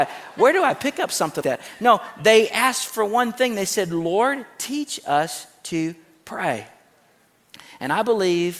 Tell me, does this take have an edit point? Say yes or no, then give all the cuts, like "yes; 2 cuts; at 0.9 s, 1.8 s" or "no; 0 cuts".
yes; 1 cut; at 1.4 s